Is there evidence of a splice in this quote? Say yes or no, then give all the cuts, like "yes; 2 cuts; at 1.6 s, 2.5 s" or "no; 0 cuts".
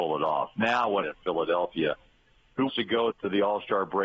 yes; 3 cuts; at 1.0 s, 2.7 s, 3.1 s